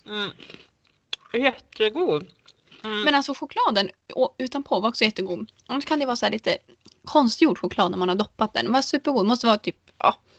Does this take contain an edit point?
no; 0 cuts

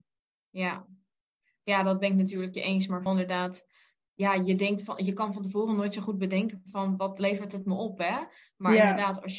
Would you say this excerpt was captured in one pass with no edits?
no; 3 cuts; at 2.5 s, 3.1 s, 4.1 s

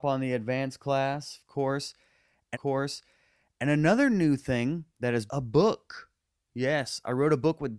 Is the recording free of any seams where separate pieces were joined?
no; 3 cuts; at 2.5 s, 4.9 s, 5.3 s

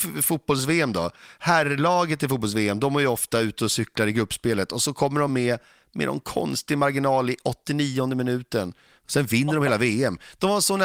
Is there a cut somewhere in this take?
no; 0 cuts

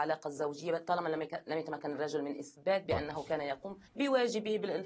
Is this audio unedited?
no; 1 cut; at 3.9 s

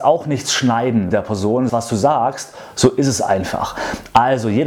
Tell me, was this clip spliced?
yes; 2 cuts; at 1.1 s, 1.7 s

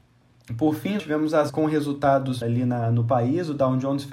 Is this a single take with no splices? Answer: no; 3 cuts; at 1.0 s, 1.5 s, 2.4 s

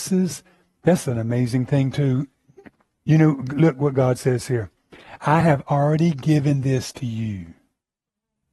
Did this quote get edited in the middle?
no; 0 cuts

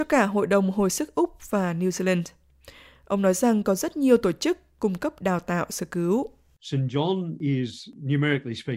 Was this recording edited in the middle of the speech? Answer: no; 0 cuts

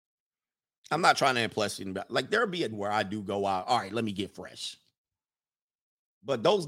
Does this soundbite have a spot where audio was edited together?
yes; 1 cut; at 2.7 s

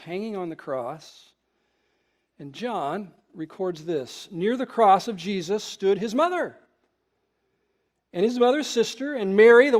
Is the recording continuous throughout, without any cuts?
yes; 0 cuts

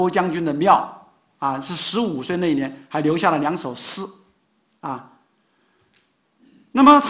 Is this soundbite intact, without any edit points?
yes; 0 cuts

